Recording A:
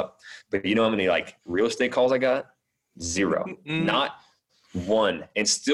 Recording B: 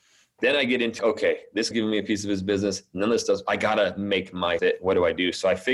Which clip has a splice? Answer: B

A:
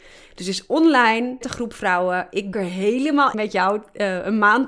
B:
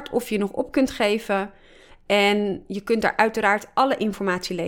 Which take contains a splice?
A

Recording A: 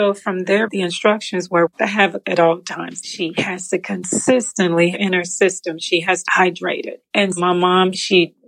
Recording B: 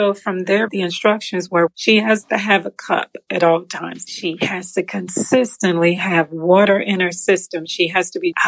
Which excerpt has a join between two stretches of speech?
A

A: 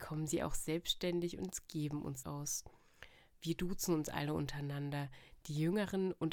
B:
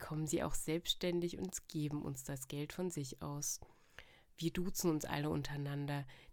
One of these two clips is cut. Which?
A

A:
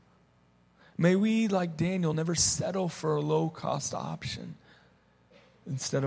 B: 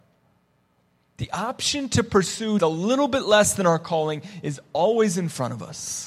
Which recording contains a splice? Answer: B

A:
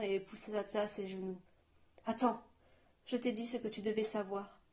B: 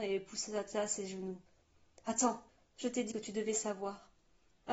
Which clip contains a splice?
B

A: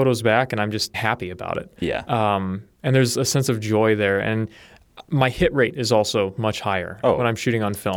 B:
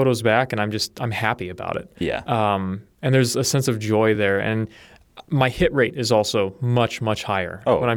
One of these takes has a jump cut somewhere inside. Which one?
A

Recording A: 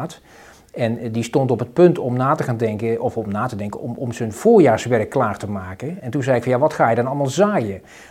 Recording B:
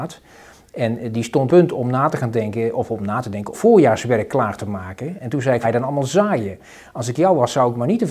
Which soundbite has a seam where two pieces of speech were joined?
B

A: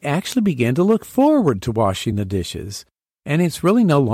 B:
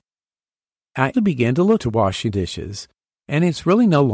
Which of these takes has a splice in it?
B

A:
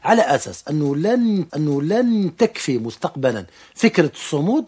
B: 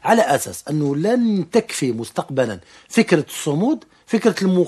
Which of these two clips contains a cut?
A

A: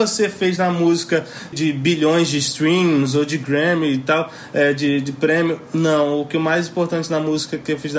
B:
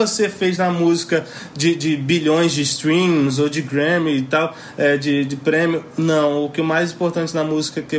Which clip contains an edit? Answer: A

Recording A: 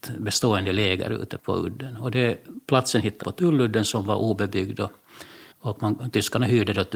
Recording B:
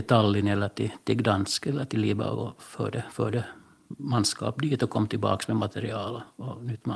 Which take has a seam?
A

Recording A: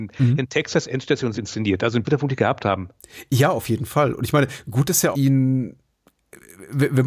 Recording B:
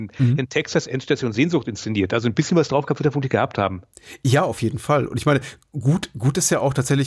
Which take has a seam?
A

